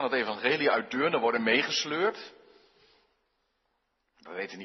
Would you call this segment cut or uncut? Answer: uncut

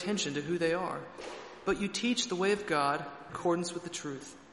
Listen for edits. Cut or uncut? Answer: cut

